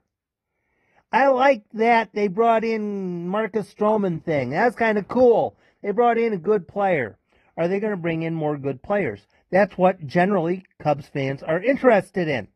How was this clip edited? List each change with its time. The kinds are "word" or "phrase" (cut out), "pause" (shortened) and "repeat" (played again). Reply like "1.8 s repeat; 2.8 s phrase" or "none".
none